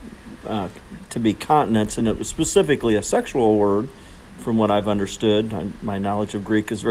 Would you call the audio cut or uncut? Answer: uncut